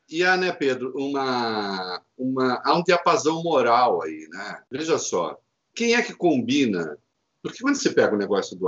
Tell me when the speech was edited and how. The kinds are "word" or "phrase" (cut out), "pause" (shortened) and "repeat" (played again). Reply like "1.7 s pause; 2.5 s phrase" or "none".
4.7 s pause; 5.5 s pause